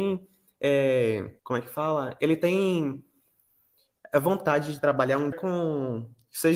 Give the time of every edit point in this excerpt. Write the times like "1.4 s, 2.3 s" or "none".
1.4 s, 5.3 s